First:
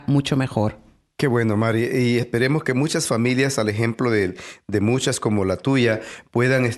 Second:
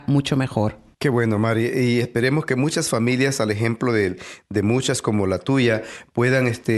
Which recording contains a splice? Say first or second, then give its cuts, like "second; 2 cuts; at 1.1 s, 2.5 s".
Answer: second; 1 cut; at 0.9 s